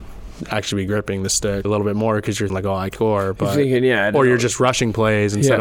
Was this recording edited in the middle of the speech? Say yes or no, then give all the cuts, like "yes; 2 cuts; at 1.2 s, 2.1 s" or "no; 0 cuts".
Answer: yes; 3 cuts; at 1.6 s, 2.5 s, 2.9 s